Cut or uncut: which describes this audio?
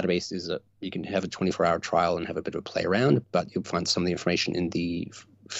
cut